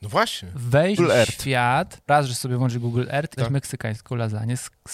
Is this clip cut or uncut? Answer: cut